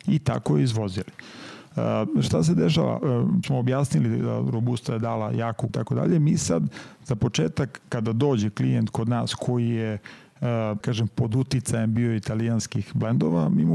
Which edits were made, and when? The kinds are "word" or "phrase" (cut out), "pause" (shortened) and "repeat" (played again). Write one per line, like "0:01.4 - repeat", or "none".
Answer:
0:03.4 - word
0:05.7 - word
0:10.8 - word